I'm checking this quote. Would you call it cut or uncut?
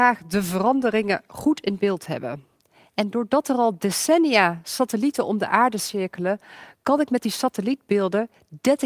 uncut